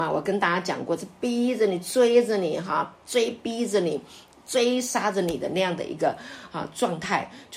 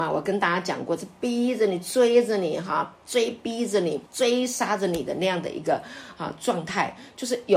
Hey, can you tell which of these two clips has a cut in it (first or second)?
second